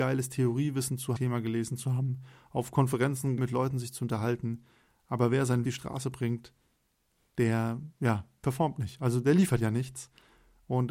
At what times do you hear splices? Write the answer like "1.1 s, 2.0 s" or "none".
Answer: 1.2 s, 3.4 s, 5.6 s